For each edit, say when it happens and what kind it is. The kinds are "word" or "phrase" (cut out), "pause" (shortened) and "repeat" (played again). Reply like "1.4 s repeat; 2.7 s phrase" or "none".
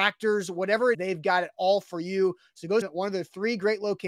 0.9 s word; 2.8 s word